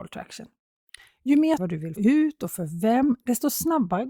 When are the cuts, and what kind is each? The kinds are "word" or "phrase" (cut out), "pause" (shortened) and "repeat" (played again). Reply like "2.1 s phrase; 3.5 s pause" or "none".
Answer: 1.6 s phrase; 2.0 s word